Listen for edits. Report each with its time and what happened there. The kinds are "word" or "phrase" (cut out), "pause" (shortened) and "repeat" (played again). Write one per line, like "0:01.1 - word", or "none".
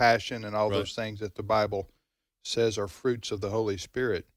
none